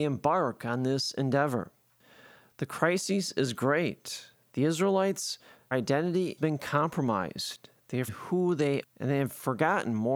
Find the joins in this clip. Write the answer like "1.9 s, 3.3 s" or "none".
5.7 s, 6.4 s, 8.1 s, 8.8 s